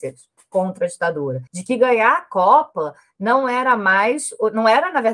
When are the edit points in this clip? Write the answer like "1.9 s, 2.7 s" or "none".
1.5 s